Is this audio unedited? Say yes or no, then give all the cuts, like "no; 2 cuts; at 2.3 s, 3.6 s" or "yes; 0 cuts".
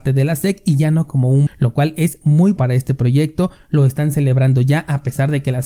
no; 2 cuts; at 1.5 s, 2.6 s